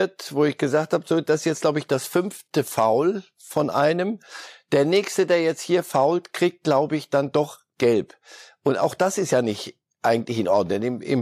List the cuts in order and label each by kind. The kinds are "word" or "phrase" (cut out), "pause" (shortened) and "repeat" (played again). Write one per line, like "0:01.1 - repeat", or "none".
none